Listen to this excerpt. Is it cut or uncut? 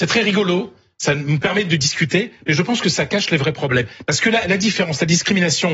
uncut